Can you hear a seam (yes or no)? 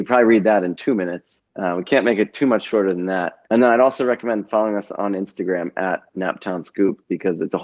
yes